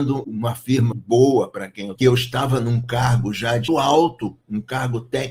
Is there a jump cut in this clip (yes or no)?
yes